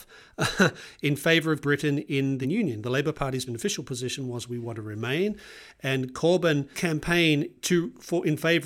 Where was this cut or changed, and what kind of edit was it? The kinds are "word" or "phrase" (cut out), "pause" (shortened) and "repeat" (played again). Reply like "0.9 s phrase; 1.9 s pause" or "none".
1.6 s word; 2.4 s word; 3.5 s word; 6.7 s word